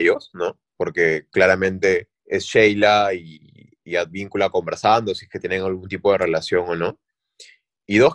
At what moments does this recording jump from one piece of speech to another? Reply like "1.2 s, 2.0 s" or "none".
2.2 s